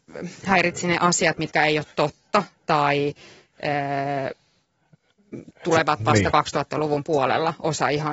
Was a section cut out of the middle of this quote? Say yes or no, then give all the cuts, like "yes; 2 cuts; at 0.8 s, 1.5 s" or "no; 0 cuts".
no; 0 cuts